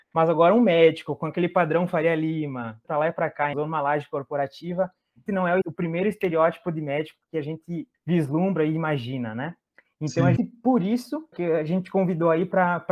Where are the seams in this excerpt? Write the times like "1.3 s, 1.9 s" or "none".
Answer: 2.8 s, 3.5 s, 5.3 s, 5.6 s, 7.9 s, 10.4 s, 11.3 s